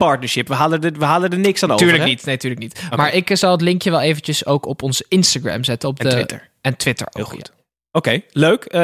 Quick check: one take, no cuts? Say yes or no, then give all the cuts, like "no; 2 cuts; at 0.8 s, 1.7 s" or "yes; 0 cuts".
yes; 0 cuts